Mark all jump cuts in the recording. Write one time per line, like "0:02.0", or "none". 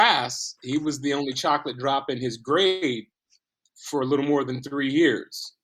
none